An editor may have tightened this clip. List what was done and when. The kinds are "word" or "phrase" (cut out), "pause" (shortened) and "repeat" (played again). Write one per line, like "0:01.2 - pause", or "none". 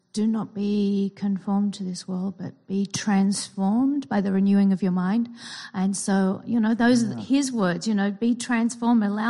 none